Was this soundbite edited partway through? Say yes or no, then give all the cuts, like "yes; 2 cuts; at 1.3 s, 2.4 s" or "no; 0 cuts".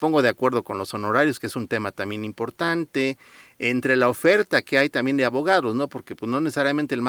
no; 0 cuts